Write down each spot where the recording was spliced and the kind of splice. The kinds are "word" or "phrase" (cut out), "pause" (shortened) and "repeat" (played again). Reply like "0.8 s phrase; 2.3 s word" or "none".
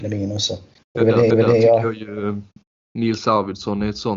1.3 s repeat